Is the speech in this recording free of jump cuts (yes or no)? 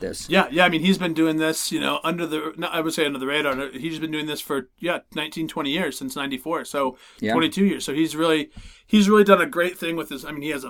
yes